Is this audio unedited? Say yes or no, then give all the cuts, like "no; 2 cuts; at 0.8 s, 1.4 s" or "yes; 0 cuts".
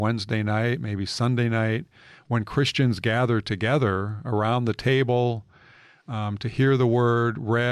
yes; 0 cuts